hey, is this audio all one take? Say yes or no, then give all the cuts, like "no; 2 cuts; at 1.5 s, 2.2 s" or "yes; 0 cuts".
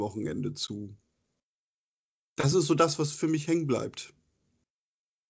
yes; 0 cuts